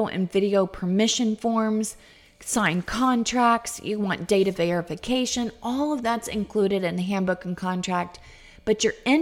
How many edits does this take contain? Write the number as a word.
zero